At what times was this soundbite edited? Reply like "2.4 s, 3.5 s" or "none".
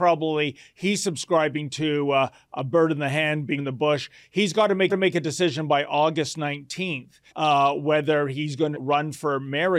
3.6 s, 4.9 s, 7.3 s, 8.7 s